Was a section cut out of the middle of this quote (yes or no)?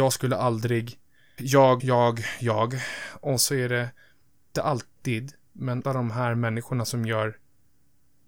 yes